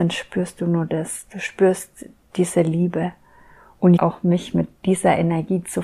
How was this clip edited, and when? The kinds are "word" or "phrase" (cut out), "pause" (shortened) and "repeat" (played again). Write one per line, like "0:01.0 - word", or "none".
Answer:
0:04.0 - phrase